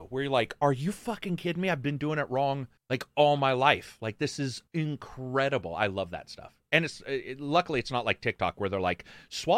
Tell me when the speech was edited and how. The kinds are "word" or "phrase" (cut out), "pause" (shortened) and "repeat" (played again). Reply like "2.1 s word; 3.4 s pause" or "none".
2.8 s pause; 4.7 s pause